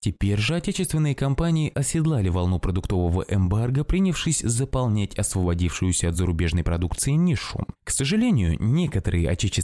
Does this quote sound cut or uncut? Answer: uncut